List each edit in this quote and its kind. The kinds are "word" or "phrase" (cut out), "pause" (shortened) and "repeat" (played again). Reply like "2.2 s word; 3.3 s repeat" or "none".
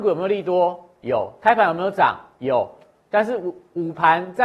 none